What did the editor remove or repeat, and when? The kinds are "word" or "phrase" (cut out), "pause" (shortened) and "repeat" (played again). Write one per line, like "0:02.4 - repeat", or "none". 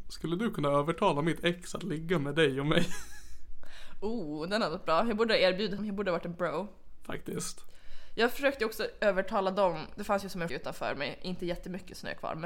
0:05.8 - word
0:10.5 - word